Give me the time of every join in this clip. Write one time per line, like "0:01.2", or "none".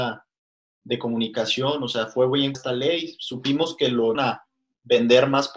0:02.5
0:04.1